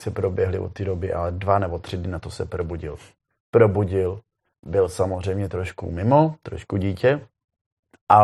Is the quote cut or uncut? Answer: uncut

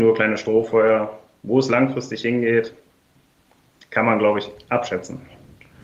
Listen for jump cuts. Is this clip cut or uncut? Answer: uncut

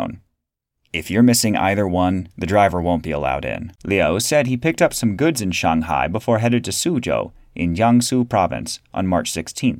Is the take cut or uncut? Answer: cut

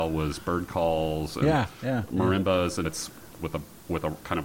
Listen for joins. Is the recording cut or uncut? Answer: cut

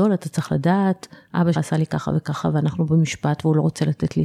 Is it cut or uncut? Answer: cut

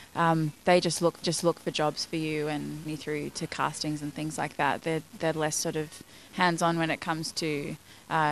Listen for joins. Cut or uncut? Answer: cut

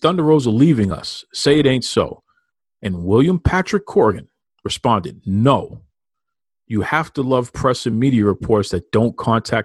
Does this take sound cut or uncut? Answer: uncut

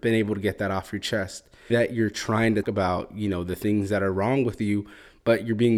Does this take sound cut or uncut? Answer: cut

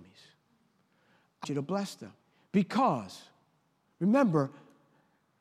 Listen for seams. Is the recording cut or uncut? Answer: cut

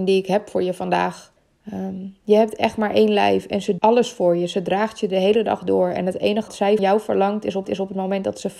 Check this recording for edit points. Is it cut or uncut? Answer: cut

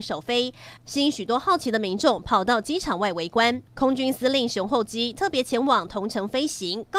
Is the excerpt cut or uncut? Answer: cut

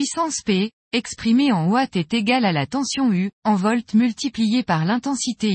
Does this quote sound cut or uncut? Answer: cut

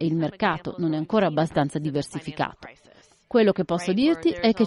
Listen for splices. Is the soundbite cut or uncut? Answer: uncut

